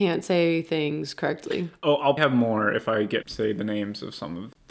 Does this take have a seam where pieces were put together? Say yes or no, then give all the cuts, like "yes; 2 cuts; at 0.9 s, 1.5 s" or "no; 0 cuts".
yes; 2 cuts; at 2.2 s, 3.2 s